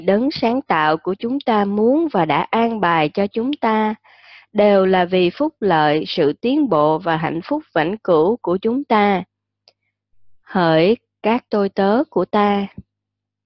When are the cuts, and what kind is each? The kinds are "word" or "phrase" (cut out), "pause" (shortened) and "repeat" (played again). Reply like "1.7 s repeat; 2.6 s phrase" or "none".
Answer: none